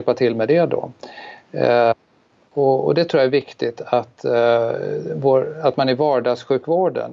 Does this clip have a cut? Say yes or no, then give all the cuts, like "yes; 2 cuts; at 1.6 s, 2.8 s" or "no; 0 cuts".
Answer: no; 0 cuts